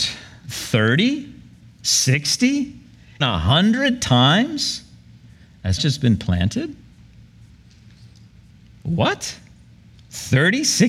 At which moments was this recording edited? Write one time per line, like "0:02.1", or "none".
0:03.2
0:05.8